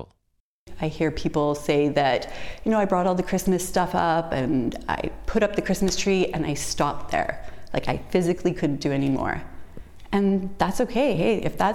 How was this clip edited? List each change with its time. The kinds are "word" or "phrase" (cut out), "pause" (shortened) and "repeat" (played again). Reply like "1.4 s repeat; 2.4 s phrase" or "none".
none

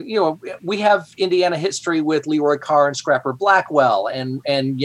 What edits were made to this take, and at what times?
none

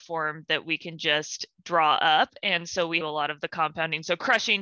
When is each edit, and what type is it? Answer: 3.0 s phrase

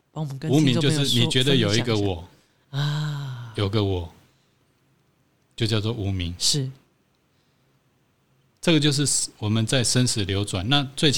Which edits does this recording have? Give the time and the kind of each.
none

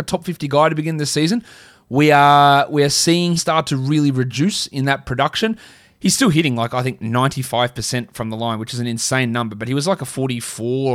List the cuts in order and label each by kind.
3.4 s word

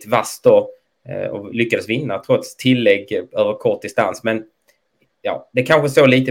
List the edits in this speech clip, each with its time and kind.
none

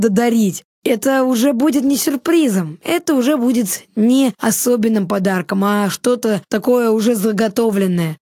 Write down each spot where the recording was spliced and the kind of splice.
none

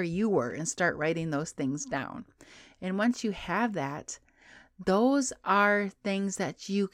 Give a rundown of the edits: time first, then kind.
none

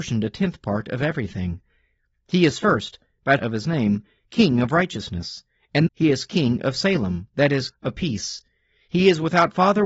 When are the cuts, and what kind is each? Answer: 3.4 s word; 5.9 s word; 7.7 s word

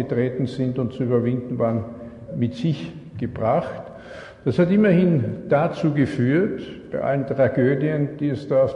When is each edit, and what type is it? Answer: 2.3 s word

